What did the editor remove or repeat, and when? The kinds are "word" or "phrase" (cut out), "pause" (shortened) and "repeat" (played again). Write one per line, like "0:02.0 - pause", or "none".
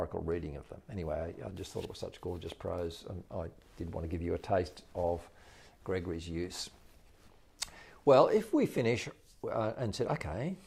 none